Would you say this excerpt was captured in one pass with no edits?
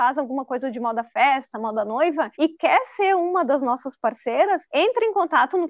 no; 2 cuts; at 2.3 s, 4.7 s

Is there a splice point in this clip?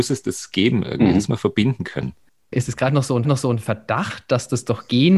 yes; 3 cuts; at 1.3 s, 2.3 s, 3.2 s

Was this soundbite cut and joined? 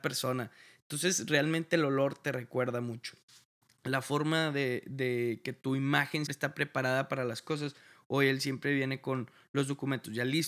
yes; 1 cut; at 6.3 s

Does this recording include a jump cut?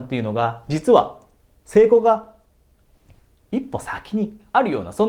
no; 0 cuts

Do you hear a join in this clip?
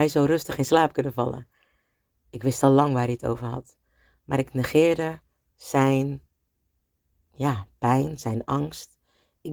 no; 0 cuts

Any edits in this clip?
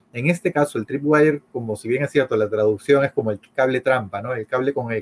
no; 0 cuts

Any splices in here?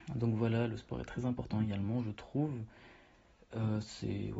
no; 0 cuts

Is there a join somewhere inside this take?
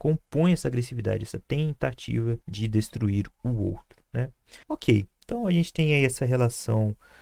yes; 2 cuts; at 2.4 s, 4.6 s

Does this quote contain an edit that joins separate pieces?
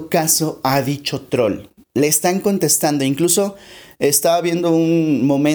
no; 0 cuts

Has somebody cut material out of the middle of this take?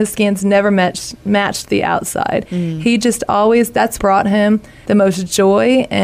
yes; 1 cut; at 4.0 s

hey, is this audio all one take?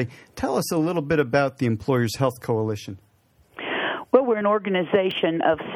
yes; 0 cuts

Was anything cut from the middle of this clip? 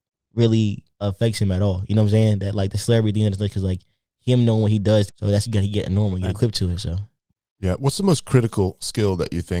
no; 0 cuts

